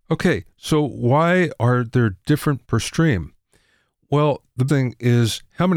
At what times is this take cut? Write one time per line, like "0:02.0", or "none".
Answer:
0:02.6
0:04.7